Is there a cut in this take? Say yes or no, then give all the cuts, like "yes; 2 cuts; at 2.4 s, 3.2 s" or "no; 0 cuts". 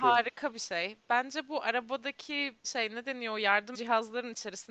yes; 2 cuts; at 2.6 s, 3.7 s